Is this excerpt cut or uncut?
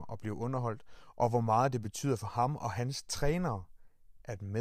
uncut